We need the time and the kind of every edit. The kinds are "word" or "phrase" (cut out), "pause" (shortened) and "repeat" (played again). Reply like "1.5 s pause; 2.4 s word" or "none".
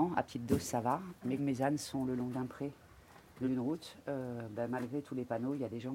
1.4 s word; 3.4 s word